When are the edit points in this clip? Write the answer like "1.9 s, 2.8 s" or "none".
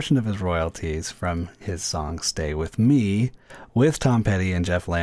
none